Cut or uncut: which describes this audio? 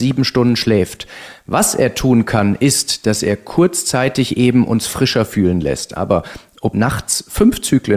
cut